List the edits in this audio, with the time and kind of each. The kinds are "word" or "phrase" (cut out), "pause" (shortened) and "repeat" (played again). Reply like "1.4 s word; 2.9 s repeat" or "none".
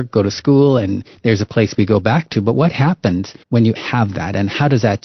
3.4 s pause; 3.7 s phrase